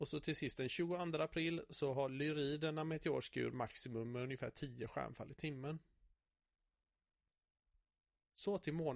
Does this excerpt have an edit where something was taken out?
no; 0 cuts

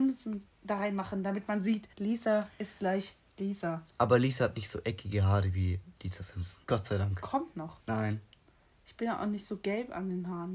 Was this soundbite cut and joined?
yes; 3 cuts; at 1.9 s, 6.6 s, 7.8 s

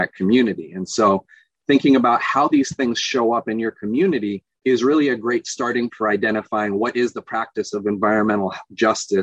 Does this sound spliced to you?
yes; 2 cuts; at 4.6 s, 5.9 s

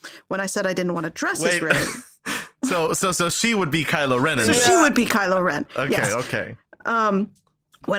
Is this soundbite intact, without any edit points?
yes; 0 cuts

